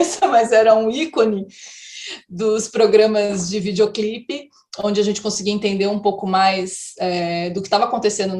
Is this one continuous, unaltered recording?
yes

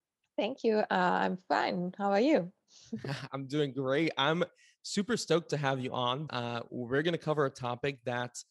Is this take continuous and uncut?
no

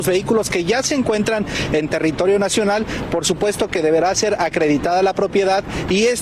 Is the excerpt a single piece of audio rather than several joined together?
yes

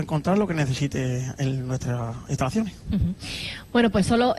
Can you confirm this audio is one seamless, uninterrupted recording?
yes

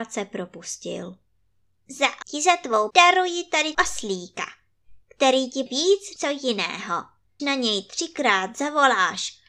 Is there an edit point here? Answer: yes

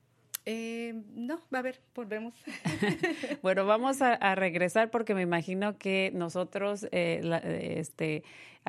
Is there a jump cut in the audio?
no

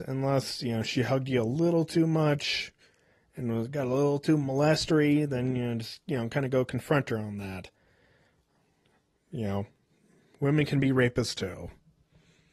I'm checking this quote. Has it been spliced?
no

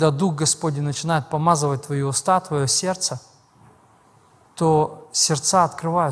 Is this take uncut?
yes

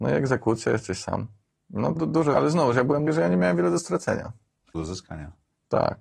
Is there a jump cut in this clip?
yes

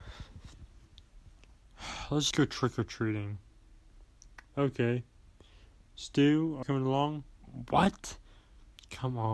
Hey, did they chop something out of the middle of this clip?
yes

